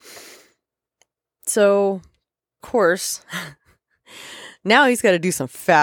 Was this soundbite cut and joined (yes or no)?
yes